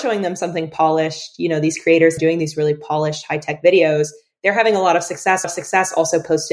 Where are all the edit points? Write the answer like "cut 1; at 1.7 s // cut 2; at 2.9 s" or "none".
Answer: cut 1; at 2.2 s // cut 2; at 5.4 s